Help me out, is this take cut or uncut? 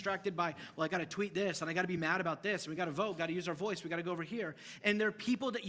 uncut